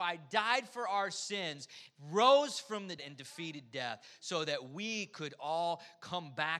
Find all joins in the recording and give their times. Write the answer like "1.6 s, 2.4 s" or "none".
3.0 s